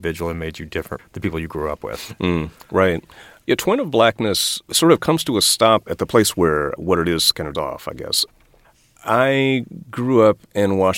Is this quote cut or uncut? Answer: cut